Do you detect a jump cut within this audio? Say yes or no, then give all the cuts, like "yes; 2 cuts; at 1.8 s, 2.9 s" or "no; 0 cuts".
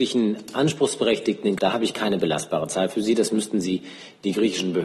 yes; 1 cut; at 1.6 s